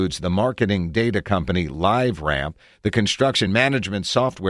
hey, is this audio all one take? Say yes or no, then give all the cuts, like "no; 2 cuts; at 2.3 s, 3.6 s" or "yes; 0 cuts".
yes; 0 cuts